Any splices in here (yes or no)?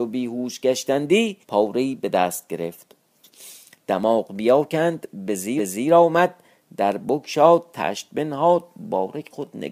yes